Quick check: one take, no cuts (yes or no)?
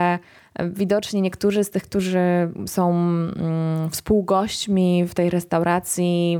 yes